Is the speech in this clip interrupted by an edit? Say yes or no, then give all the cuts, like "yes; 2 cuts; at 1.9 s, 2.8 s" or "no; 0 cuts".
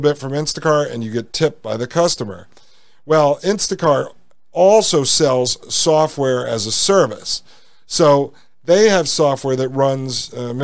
no; 0 cuts